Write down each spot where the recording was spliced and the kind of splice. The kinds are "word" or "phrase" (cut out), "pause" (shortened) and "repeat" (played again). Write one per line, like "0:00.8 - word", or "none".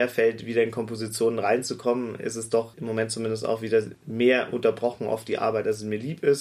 none